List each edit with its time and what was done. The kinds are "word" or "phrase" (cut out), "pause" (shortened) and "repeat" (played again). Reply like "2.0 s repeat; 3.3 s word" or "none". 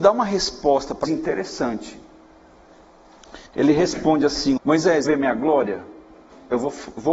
1.0 s word; 3.5 s pause; 4.6 s word; 5.1 s phrase